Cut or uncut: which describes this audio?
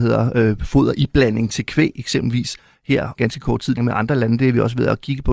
cut